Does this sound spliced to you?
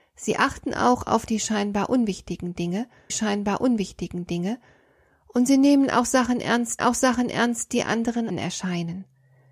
yes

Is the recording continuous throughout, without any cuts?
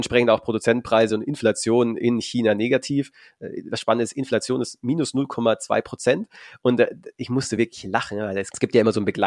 yes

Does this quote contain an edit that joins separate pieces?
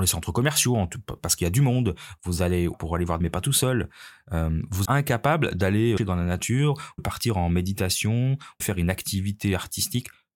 yes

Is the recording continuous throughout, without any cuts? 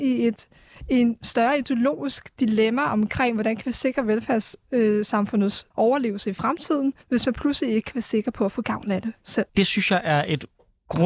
no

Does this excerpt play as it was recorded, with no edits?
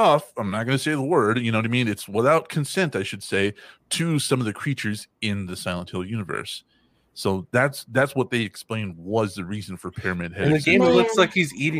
yes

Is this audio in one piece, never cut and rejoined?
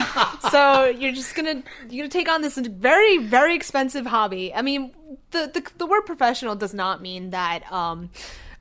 yes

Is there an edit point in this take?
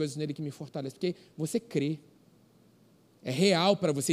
no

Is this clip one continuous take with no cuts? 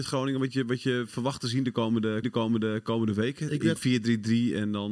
no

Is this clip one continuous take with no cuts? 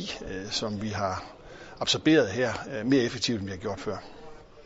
yes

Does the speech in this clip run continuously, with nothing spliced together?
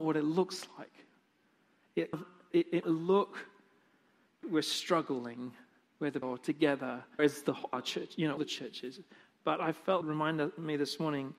no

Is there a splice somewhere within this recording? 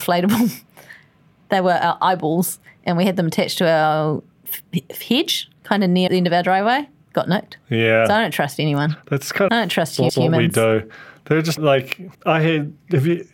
yes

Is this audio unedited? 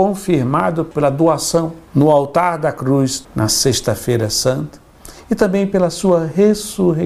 yes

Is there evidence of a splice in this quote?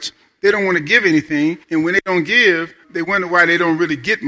yes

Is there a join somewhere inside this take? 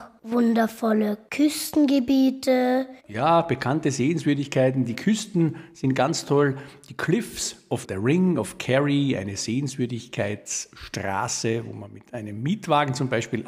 yes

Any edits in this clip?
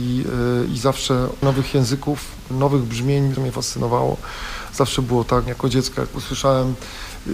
yes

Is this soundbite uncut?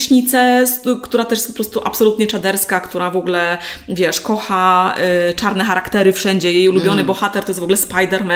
yes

